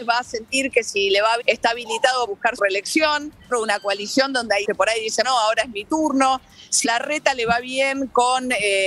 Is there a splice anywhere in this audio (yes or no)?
yes